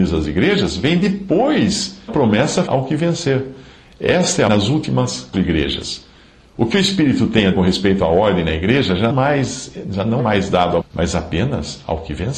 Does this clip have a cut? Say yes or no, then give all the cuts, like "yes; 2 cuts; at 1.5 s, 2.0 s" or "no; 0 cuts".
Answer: yes; 8 cuts; at 2.1 s, 2.7 s, 4.5 s, 5.3 s, 7.5 s, 9.1 s, 10.2 s, 10.8 s